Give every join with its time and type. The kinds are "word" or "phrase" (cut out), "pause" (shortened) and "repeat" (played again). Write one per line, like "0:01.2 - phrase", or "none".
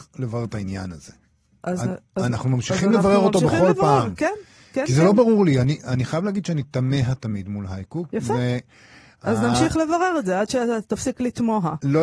none